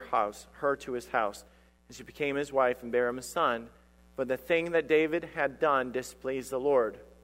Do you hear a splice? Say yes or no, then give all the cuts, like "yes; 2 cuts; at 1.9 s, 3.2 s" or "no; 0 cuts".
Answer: no; 0 cuts